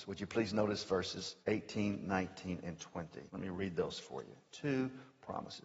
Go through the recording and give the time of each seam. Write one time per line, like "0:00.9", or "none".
0:01.4
0:03.3